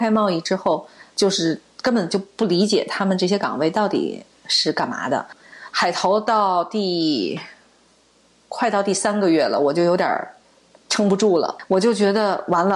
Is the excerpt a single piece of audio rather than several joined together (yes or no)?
yes